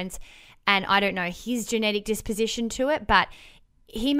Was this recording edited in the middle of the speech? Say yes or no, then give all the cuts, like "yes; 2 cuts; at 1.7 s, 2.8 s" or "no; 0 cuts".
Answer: no; 0 cuts